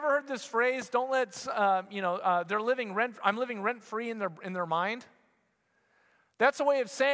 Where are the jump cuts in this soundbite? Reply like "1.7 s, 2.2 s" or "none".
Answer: none